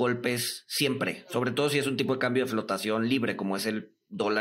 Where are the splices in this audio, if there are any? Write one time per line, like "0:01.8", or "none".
none